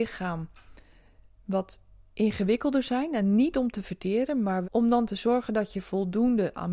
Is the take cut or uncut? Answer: cut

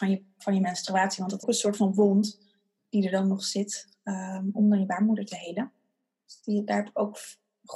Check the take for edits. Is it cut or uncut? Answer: cut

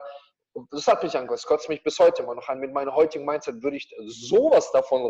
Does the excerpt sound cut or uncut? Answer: uncut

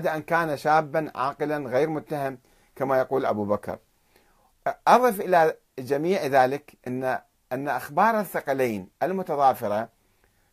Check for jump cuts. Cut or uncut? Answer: uncut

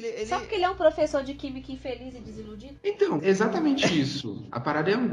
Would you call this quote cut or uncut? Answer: cut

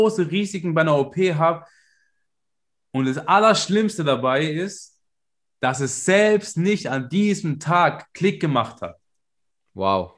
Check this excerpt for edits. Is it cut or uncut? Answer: uncut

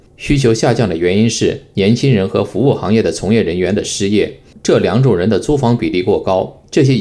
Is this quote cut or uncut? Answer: uncut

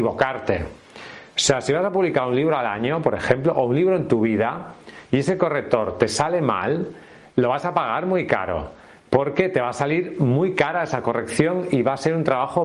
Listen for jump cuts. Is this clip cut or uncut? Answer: uncut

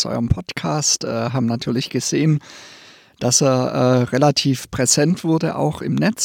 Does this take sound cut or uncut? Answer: uncut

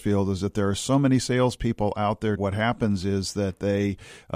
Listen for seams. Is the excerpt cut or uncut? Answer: cut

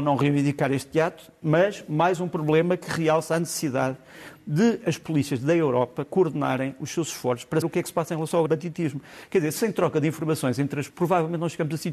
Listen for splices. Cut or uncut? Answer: cut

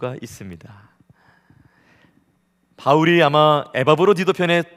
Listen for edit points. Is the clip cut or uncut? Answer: uncut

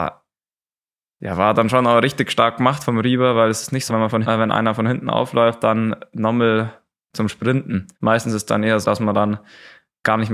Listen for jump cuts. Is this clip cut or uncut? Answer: cut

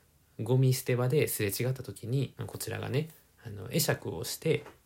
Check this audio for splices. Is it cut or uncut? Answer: cut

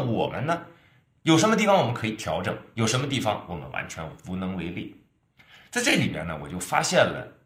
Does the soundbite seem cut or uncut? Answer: uncut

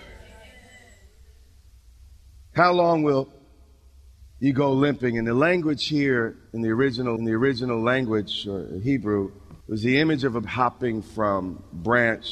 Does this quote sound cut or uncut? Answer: cut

